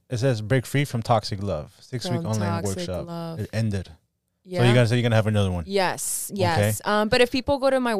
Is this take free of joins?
yes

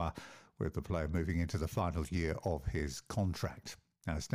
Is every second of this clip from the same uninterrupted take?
yes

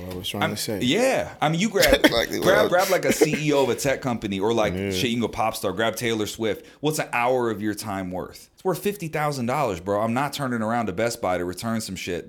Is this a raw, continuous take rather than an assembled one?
no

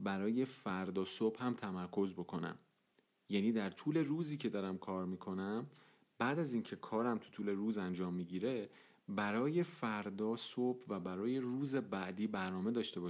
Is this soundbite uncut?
yes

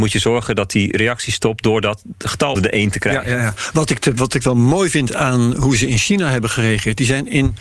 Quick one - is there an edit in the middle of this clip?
yes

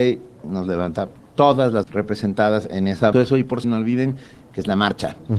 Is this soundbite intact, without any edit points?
no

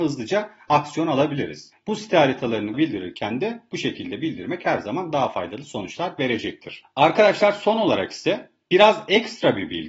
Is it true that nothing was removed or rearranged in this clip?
no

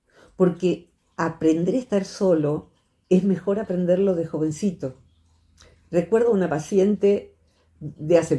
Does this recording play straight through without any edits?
yes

